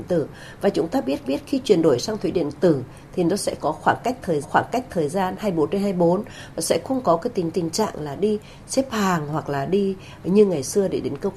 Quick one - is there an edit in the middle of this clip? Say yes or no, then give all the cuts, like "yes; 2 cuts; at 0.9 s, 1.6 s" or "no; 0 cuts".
yes; 4 cuts; at 1.2 s, 3.6 s, 4.4 s, 7.5 s